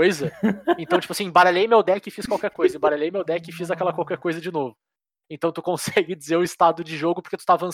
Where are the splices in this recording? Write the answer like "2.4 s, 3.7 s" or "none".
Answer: none